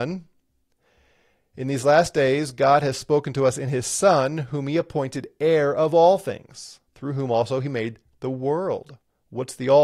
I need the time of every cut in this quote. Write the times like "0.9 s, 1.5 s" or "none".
6.9 s